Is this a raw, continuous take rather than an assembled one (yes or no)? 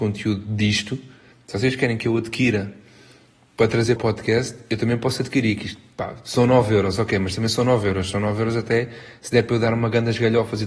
no